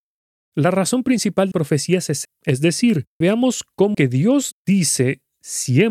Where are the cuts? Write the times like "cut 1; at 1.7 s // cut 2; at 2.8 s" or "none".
cut 1; at 1.5 s // cut 2; at 2.2 s // cut 3; at 3.2 s // cut 4; at 3.9 s